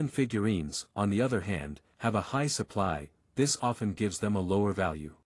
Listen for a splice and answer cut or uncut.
uncut